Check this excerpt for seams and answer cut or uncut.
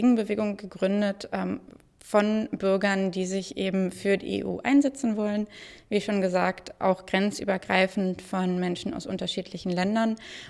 uncut